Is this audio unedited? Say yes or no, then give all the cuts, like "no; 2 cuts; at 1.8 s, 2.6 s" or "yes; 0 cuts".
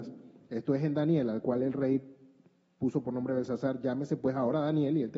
yes; 0 cuts